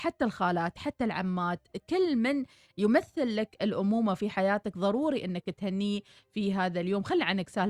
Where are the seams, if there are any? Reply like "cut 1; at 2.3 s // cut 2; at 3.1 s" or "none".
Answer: none

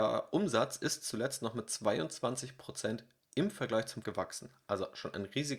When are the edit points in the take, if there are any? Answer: cut 1; at 4.0 s

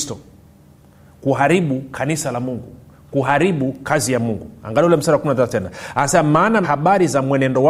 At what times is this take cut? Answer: cut 1; at 6.6 s

